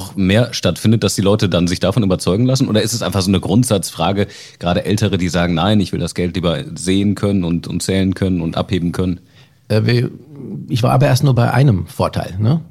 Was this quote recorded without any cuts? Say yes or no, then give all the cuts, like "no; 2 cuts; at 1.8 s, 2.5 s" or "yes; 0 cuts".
yes; 0 cuts